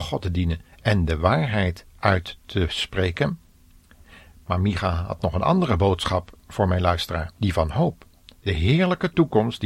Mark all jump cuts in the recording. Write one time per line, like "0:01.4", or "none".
0:07.4

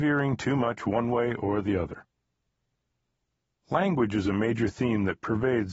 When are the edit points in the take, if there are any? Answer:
none

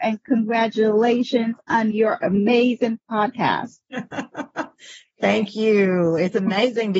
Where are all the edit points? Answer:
none

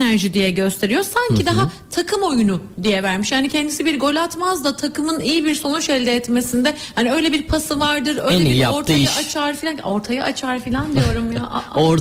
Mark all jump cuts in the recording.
none

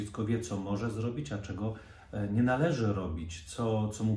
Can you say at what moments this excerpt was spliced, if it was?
none

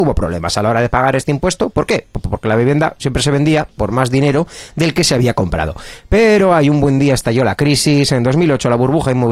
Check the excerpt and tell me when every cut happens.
none

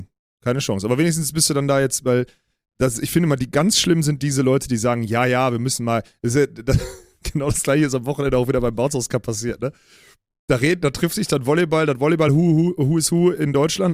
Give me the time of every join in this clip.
none

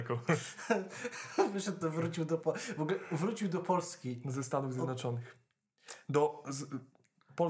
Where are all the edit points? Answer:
0:01.8

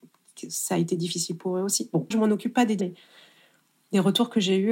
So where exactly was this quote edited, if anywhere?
0:02.1
0:02.8

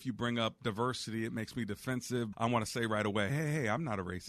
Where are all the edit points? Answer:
0:02.3
0:03.3

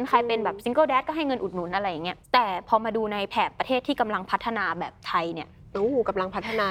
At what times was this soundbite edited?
0:02.2

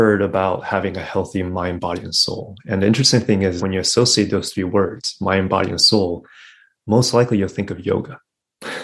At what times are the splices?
0:03.6

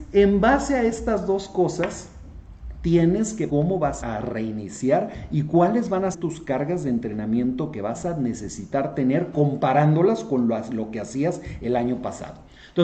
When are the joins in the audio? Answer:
0:03.5
0:04.0
0:06.1

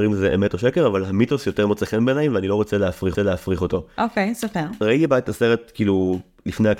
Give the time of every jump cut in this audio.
0:03.1

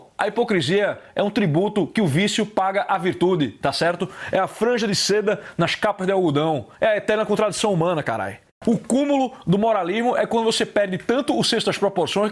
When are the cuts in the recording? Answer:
none

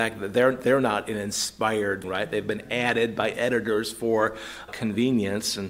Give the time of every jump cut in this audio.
0:02.0
0:04.7

